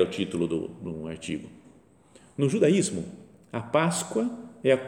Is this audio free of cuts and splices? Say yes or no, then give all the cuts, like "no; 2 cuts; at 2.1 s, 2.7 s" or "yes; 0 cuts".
yes; 0 cuts